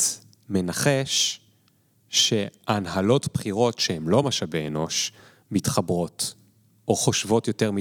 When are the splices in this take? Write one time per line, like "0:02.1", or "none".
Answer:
none